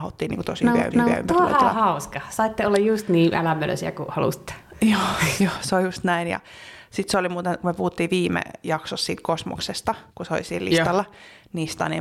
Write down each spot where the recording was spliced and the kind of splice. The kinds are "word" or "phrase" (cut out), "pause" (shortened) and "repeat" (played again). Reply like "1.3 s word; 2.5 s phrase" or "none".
0.9 s repeat; 10.1 s pause